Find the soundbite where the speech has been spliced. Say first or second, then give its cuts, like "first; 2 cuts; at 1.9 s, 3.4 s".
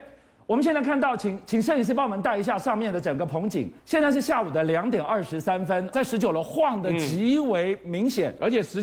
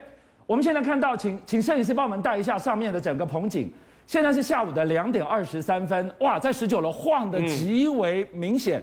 first; 2 cuts; at 3.8 s, 5.9 s